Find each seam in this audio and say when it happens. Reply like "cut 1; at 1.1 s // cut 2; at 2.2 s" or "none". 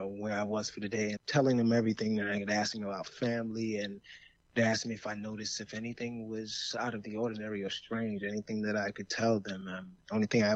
cut 1; at 1.2 s // cut 2; at 4.4 s